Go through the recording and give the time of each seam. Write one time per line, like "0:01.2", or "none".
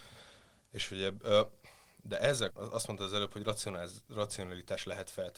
0:02.5